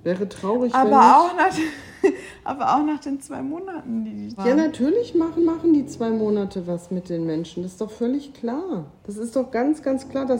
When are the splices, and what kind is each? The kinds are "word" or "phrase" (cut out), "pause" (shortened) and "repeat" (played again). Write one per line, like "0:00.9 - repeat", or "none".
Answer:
0:04.4 - word
0:05.4 - repeat
0:09.0 - pause